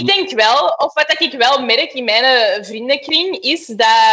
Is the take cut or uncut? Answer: uncut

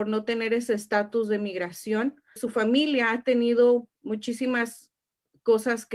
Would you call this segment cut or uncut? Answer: cut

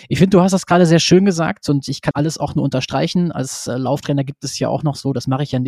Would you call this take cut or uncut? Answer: cut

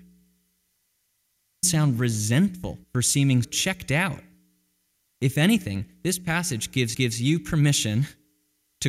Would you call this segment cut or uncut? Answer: cut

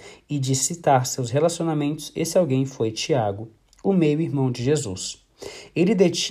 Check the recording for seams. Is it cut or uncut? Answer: uncut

